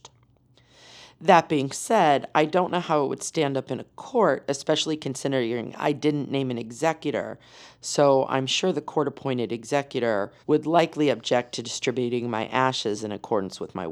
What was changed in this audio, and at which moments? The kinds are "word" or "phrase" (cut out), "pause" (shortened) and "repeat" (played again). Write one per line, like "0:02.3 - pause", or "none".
0:10.4 - pause